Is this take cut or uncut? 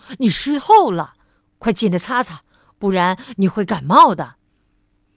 uncut